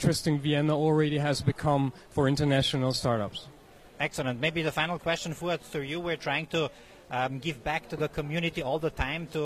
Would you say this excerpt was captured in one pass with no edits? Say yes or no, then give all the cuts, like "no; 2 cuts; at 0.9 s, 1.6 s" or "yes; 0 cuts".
yes; 0 cuts